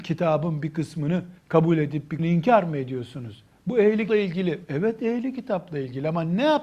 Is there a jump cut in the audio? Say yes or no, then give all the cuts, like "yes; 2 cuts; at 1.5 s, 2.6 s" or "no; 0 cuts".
yes; 3 cuts; at 1.4 s, 2.2 s, 4.1 s